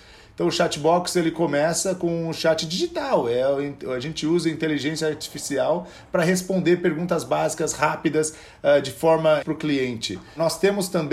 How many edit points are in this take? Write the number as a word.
one